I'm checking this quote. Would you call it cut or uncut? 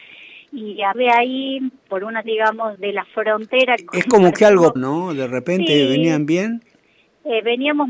cut